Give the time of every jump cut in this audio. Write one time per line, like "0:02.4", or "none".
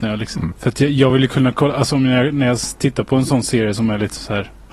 none